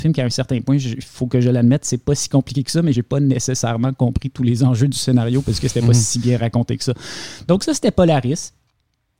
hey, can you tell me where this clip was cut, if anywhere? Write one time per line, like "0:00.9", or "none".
none